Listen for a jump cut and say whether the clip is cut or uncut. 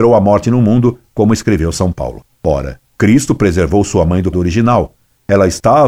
cut